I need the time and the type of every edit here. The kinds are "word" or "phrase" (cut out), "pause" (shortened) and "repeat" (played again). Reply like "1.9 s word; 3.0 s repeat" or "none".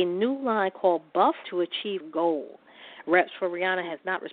1.4 s word; 2.0 s word